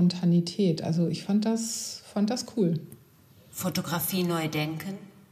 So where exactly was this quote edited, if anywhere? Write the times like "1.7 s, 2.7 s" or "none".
none